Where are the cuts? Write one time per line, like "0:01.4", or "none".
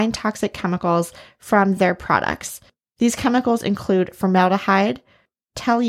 none